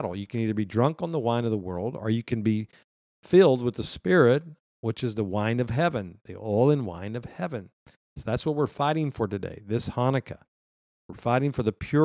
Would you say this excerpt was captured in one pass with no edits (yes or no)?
yes